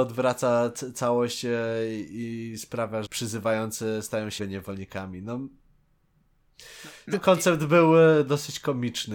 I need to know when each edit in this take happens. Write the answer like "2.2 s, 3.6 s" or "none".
3.1 s, 4.4 s, 7.1 s